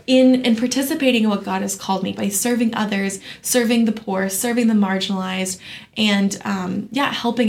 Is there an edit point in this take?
yes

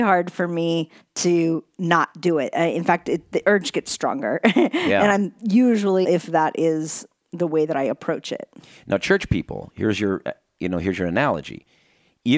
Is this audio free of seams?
no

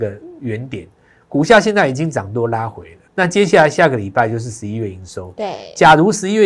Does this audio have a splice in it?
yes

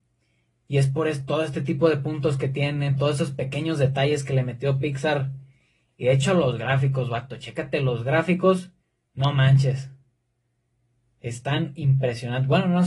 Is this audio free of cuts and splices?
yes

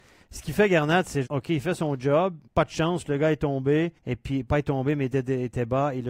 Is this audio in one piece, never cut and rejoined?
no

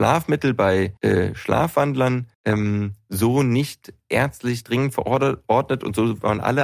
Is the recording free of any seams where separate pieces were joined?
no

